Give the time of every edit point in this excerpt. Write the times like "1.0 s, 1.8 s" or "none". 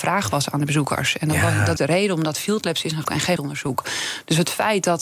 1.8 s, 3.0 s, 3.4 s